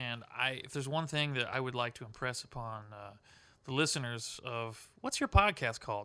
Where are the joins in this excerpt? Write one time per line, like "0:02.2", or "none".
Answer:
none